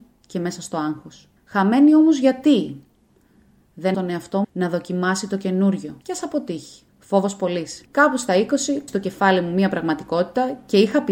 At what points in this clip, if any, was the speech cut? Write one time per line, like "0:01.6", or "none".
0:01.4
0:03.9
0:04.4
0:06.0
0:06.9
0:07.9
0:08.9